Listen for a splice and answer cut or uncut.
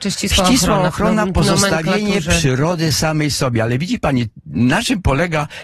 uncut